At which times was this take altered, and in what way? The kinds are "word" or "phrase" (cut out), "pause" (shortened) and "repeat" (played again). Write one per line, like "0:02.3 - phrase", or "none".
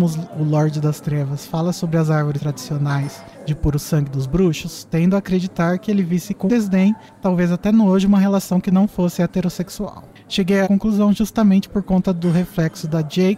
0:02.4 - word
0:06.5 - word
0:10.6 - word